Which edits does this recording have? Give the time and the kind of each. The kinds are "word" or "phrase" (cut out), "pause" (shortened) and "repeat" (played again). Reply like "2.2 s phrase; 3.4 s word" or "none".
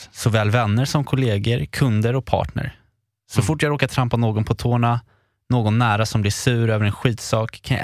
none